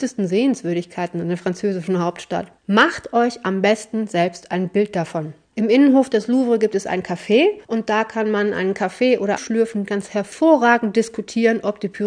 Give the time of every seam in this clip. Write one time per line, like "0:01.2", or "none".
0:02.6
0:05.4
0:07.6
0:09.4